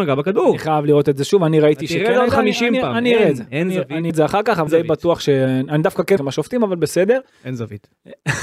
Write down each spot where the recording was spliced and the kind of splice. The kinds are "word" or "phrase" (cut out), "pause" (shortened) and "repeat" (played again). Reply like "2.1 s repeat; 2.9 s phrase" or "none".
4.1 s word; 4.7 s word; 6.2 s word